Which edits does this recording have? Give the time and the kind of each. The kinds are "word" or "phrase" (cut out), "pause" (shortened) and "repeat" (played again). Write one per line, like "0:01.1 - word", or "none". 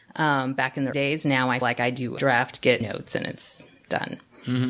0:00.9 - word
0:01.6 - word
0:02.2 - word
0:02.8 - phrase